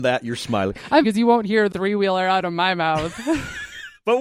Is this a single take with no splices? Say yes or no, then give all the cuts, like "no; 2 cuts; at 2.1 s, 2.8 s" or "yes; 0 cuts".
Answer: no; 2 cuts; at 1.0 s, 1.7 s